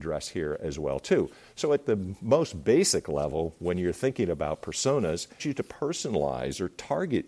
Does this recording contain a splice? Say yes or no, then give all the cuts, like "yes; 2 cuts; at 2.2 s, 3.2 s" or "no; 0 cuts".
yes; 1 cut; at 5.4 s